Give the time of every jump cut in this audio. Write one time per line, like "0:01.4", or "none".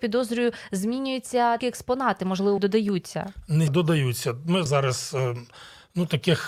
0:01.6
0:02.6
0:03.7
0:04.7